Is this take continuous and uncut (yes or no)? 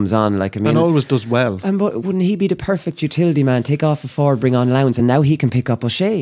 yes